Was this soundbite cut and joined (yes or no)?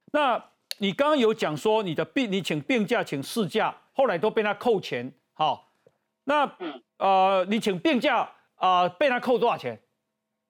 yes